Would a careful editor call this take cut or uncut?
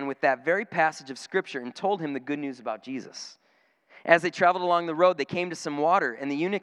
uncut